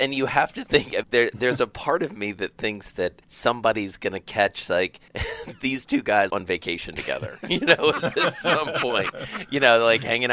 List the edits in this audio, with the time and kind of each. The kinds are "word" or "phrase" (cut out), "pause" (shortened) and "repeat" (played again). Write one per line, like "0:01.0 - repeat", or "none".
0:01.0 - word
0:03.2 - pause
0:05.1 - pause
0:06.3 - word